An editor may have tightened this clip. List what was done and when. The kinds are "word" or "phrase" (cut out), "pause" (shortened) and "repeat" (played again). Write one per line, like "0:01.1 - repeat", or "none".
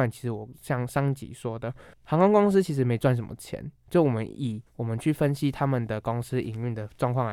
0:01.9 - pause
0:04.7 - pause